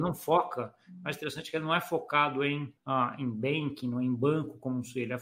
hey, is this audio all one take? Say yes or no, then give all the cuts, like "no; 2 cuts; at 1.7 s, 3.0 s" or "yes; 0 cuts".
no; 1 cut; at 2.8 s